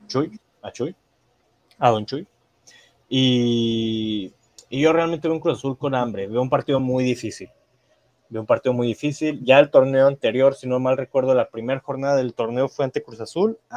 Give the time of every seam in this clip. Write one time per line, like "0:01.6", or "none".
none